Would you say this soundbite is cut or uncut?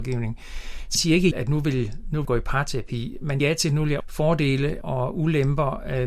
cut